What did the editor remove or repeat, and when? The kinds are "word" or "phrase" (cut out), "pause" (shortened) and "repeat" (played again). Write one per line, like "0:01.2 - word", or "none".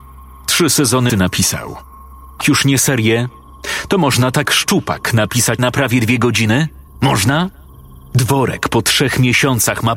0:01.1 - word
0:02.4 - word
0:04.4 - word
0:05.6 - word